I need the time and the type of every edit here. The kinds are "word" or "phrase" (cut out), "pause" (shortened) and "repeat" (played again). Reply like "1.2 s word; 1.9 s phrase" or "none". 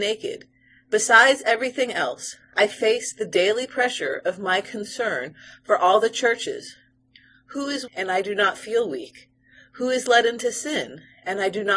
7.9 s word